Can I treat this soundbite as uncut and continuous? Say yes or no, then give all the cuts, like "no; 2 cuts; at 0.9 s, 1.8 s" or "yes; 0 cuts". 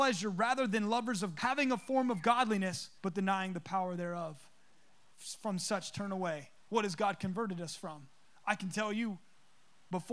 no; 3 cuts; at 1.4 s, 3.0 s, 6.6 s